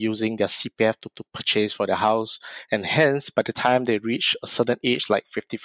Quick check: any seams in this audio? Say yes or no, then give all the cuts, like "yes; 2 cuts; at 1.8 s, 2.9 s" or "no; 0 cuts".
yes; 1 cut; at 1.1 s